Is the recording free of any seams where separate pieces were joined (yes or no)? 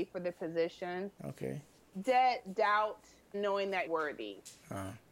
no